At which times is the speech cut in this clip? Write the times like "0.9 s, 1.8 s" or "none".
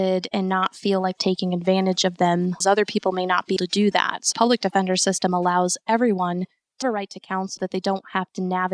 1.2 s, 2.6 s, 3.6 s, 4.3 s, 6.8 s, 7.6 s